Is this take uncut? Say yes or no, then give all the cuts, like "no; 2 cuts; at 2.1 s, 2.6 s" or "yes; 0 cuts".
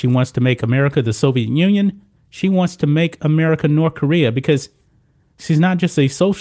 yes; 0 cuts